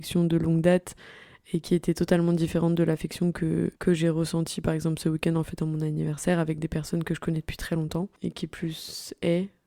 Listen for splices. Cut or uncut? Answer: cut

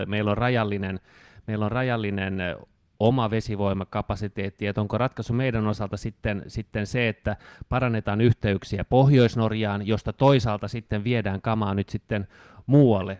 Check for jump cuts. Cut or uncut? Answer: uncut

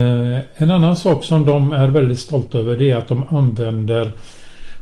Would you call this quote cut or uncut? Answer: uncut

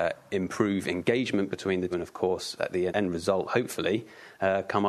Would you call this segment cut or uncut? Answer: cut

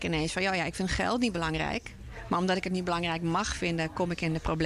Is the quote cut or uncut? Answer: uncut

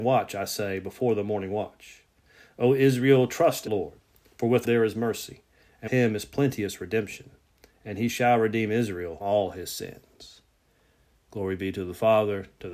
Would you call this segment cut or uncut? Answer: cut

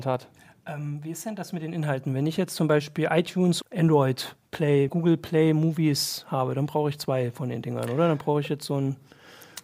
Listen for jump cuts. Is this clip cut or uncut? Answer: cut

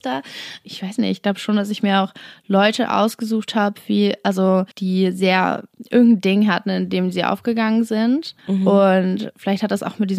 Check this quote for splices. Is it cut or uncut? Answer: cut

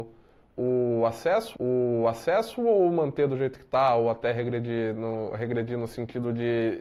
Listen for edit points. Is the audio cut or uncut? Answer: cut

